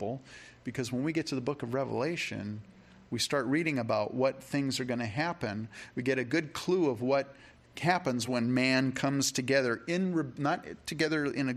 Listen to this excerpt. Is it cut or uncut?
uncut